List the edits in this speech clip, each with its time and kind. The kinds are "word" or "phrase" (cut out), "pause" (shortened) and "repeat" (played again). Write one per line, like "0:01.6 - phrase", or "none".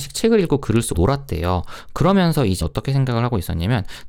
0:00.9 - word
0:02.6 - word